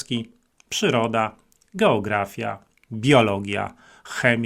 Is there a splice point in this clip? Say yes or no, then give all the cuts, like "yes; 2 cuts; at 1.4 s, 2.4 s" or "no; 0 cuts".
no; 0 cuts